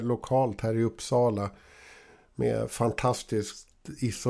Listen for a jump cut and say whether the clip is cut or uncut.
uncut